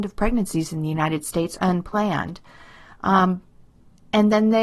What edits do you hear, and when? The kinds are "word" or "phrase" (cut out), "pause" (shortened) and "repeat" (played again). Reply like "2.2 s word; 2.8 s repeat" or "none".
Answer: 1.6 s word